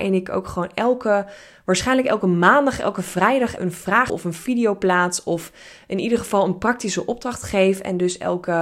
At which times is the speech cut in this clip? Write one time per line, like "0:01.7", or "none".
0:03.6
0:04.1